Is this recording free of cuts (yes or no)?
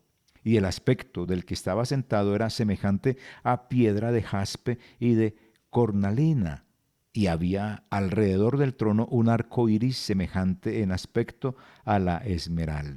yes